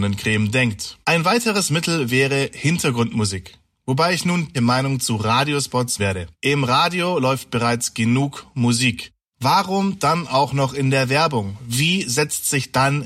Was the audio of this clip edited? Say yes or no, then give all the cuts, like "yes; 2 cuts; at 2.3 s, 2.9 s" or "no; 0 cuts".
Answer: yes; 4 cuts; at 1.0 s, 4.5 s, 6.0 s, 6.3 s